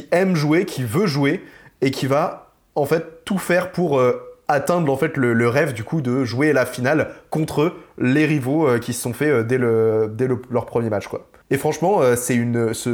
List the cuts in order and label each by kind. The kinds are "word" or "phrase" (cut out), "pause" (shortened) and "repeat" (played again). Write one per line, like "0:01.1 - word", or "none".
none